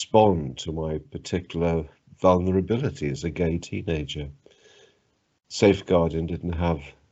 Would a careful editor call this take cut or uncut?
uncut